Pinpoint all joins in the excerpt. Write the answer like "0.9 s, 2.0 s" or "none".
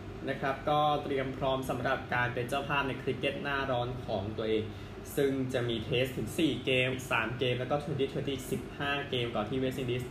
6.9 s